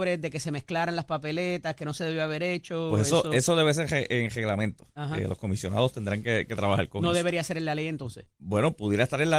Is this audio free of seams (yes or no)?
no